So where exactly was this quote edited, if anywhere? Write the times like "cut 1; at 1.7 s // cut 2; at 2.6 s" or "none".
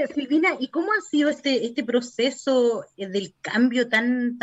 none